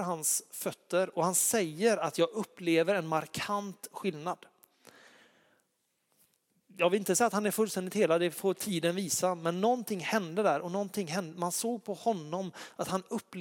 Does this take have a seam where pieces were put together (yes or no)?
no